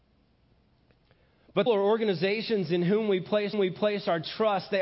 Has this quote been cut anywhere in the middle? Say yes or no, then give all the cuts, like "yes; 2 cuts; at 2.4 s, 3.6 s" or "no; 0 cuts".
yes; 2 cuts; at 1.7 s, 3.5 s